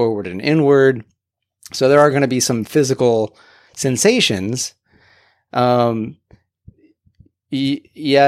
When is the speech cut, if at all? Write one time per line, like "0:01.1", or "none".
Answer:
none